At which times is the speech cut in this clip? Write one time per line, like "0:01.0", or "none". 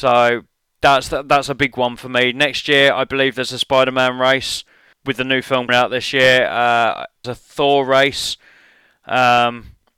0:04.9
0:05.7
0:07.2